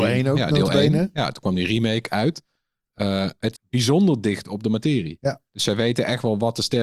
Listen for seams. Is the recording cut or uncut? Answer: cut